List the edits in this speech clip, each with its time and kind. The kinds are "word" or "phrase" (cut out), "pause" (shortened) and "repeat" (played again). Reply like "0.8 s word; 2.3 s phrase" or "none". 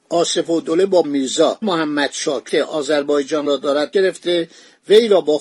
1.0 s word; 1.6 s word; 2.5 s word; 3.9 s word